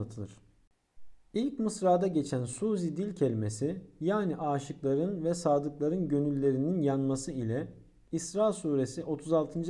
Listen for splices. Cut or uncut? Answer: uncut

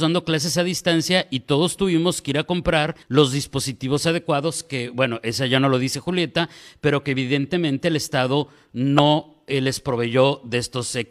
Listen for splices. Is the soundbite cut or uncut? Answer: cut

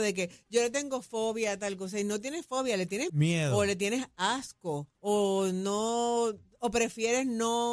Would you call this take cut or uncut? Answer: cut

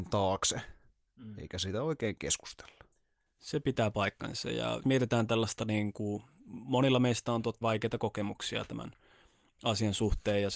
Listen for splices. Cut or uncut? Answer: cut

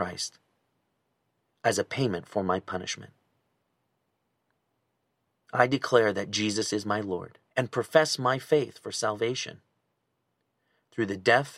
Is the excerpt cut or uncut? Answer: cut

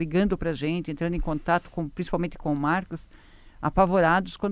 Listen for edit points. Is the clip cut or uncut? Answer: uncut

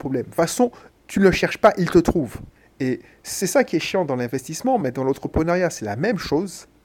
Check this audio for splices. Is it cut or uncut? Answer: uncut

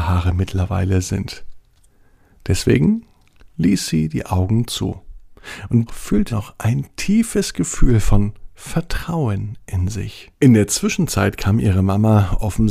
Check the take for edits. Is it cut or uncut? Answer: cut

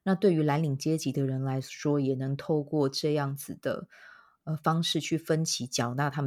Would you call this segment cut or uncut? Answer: uncut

